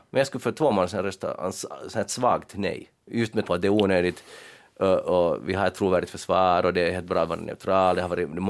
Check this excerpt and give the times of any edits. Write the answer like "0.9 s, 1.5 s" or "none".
3.0 s, 3.4 s